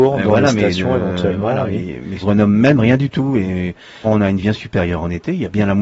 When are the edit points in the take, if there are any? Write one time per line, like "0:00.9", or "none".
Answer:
0:02.2
0:04.0
0:04.4